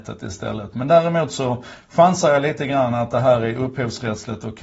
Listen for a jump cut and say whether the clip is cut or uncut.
uncut